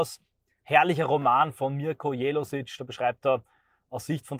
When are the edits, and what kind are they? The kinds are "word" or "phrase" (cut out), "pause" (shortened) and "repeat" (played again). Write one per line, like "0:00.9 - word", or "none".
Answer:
none